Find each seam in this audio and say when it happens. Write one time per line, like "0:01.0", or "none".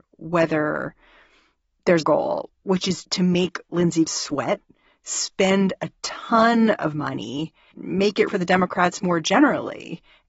0:02.0
0:03.0
0:04.1
0:07.7
0:08.3

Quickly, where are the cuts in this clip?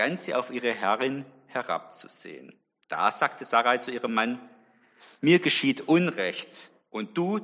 none

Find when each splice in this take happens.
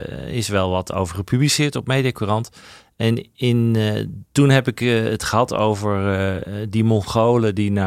none

